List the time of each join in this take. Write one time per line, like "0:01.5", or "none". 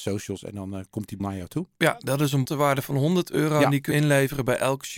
0:01.2
0:02.4
0:03.9